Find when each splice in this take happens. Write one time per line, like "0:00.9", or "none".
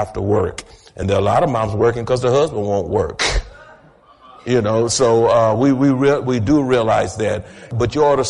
none